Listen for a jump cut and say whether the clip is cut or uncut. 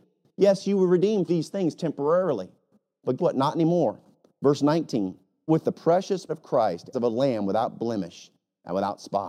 cut